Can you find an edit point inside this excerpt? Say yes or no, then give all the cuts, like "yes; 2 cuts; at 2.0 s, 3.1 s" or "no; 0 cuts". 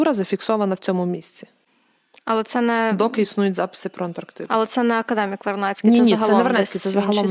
no; 0 cuts